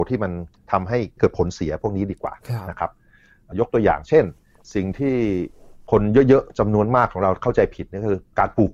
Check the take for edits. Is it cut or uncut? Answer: uncut